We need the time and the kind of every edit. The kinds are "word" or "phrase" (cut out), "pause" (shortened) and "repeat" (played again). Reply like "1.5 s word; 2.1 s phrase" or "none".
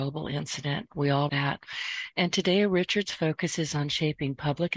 1.3 s word